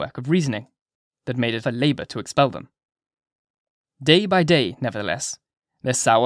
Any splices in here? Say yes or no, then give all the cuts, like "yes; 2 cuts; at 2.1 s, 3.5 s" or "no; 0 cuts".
yes; 1 cut; at 1.6 s